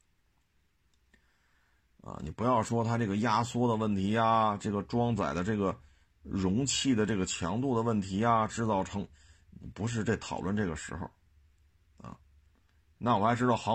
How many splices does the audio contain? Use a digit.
0